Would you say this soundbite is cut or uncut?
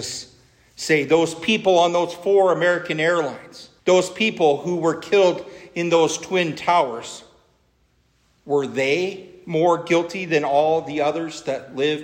cut